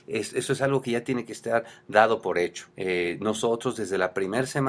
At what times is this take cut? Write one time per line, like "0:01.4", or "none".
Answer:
0:02.7